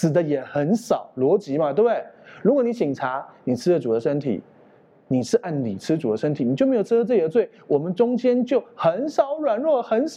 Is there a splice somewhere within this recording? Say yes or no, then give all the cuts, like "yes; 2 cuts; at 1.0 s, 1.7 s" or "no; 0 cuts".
no; 0 cuts